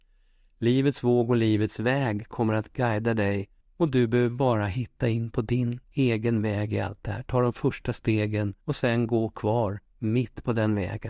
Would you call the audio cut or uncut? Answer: cut